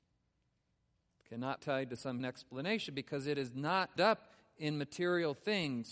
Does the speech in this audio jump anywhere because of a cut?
yes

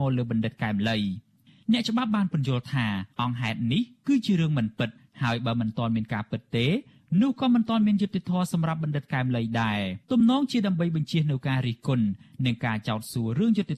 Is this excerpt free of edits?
no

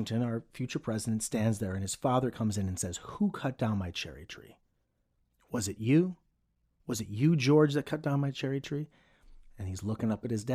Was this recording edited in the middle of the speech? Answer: no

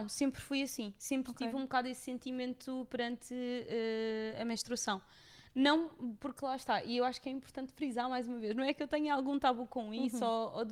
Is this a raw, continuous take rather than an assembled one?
yes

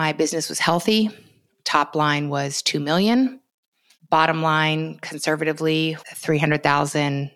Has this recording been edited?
yes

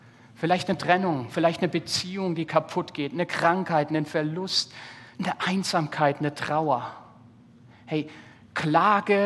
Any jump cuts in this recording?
yes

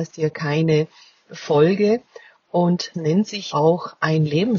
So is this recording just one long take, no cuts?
no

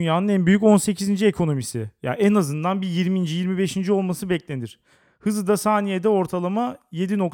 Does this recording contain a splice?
no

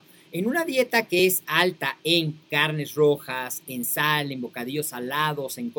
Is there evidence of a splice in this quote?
no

